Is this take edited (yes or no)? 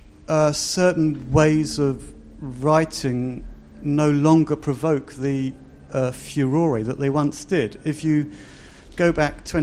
no